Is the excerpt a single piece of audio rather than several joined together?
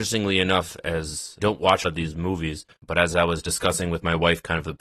no; 3 cuts; at 1.4 s, 1.8 s, 2.7 s

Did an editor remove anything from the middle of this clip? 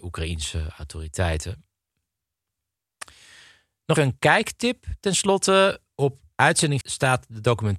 yes; 2 cuts; at 4.0 s, 6.8 s

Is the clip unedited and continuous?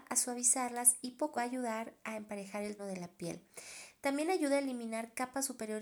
no; 2 cuts; at 1.4 s, 2.8 s

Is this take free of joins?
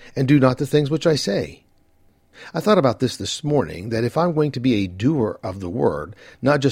yes; 0 cuts

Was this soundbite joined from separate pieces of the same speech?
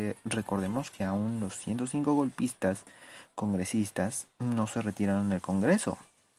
no; 0 cuts

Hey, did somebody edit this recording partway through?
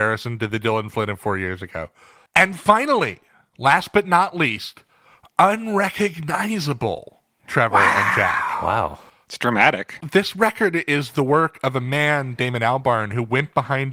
no; 0 cuts

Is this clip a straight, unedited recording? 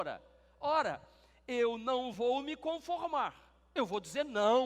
yes; 0 cuts

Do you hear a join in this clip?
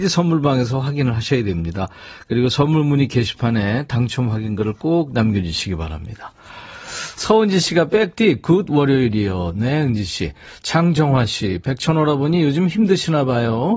no; 0 cuts

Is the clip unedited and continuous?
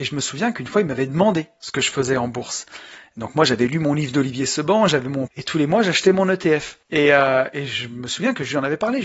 no; 2 cuts; at 5.3 s, 6.8 s

